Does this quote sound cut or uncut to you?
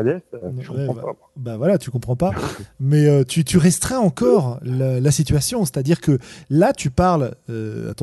uncut